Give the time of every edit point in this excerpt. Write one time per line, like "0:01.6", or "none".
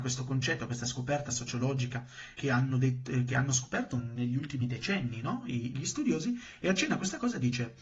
0:02.4